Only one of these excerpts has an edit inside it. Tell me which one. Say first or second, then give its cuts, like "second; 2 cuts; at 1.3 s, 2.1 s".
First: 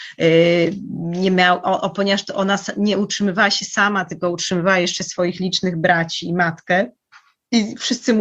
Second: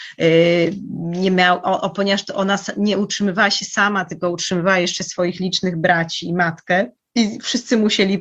second; 1 cut; at 7.0 s